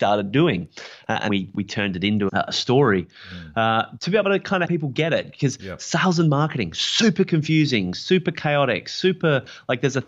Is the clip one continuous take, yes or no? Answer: no